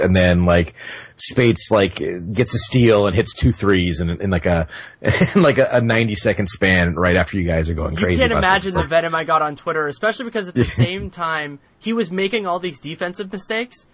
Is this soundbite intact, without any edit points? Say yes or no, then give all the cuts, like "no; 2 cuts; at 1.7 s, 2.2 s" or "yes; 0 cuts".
yes; 0 cuts